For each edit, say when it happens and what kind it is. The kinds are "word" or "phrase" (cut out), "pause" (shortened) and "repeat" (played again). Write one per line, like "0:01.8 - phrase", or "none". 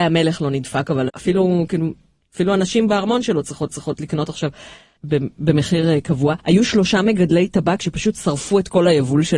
0:01.1 - word
0:03.7 - repeat
0:06.4 - pause